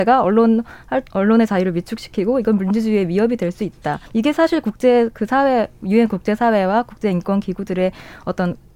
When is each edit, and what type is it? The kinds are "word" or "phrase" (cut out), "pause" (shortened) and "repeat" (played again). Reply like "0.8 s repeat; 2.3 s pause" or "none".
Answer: 1.1 s pause; 4.1 s pause